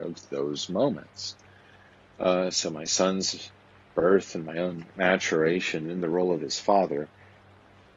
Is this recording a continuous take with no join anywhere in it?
yes; 0 cuts

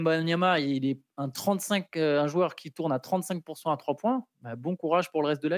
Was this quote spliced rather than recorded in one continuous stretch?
no; 0 cuts

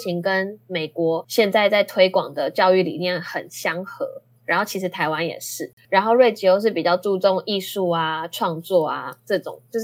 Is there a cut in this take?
no; 0 cuts

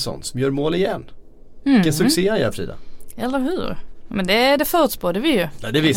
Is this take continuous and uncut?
yes; 0 cuts

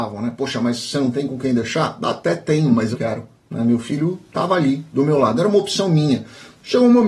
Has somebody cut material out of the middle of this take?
yes; 1 cut; at 2.9 s

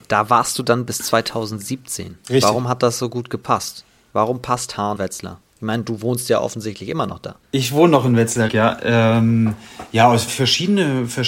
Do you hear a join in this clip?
yes; 4 cuts; at 5.0 s, 7.4 s, 8.5 s, 10.3 s

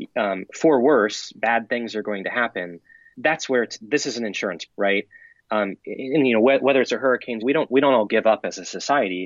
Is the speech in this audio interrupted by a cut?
yes; 4 cuts; at 3.1 s, 4.7 s, 6.9 s, 7.4 s

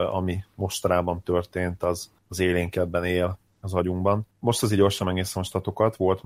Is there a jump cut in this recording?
no; 0 cuts

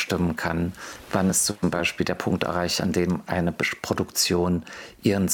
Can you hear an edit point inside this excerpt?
no; 0 cuts

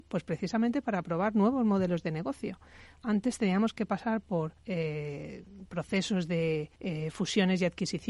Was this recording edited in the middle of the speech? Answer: yes; 2 cuts; at 4.6 s, 6.7 s

